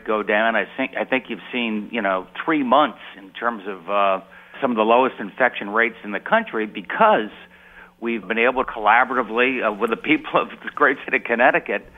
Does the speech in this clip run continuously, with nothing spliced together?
no; 4 cuts; at 4.5 s, 8.2 s, 8.6 s, 11.1 s

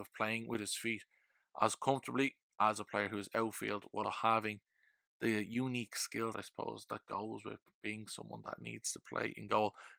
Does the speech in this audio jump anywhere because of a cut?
yes; 2 cuts; at 4.0 s, 6.3 s

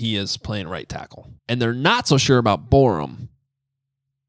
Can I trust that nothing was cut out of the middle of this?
no; 1 cut; at 1.4 s

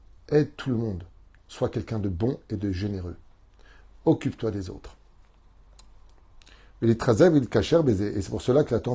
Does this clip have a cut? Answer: no; 0 cuts

